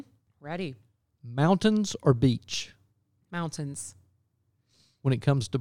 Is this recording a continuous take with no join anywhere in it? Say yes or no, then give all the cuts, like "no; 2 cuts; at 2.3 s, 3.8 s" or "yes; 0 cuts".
yes; 0 cuts